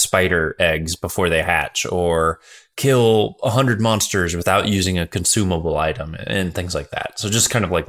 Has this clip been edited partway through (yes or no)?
no